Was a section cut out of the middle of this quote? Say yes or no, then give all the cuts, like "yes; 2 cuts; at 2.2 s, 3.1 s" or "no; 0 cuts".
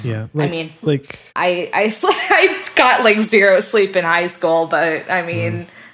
yes; 1 cut; at 1.3 s